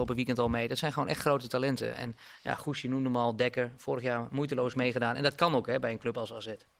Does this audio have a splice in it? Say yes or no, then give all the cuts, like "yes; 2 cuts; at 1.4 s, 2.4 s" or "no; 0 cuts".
no; 0 cuts